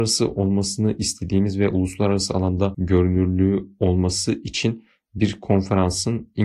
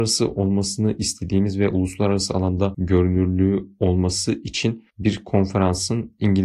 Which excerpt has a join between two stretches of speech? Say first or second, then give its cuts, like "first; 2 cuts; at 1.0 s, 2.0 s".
second; 1 cut; at 4.9 s